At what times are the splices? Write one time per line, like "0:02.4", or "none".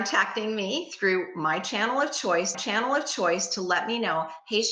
0:02.5